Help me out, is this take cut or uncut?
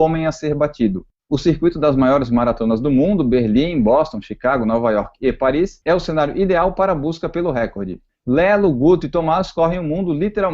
uncut